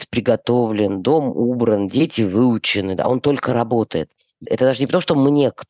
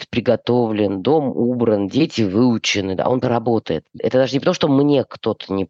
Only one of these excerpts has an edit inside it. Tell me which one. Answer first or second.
second